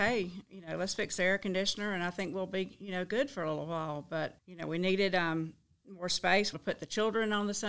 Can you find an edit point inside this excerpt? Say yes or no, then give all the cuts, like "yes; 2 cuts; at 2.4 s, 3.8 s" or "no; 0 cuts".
yes; 2 cuts; at 4.4 s, 6.5 s